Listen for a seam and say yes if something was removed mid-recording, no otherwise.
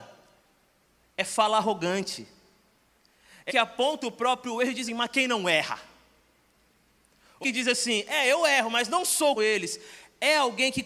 yes